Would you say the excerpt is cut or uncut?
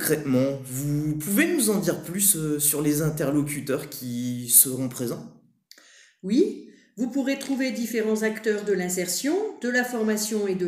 uncut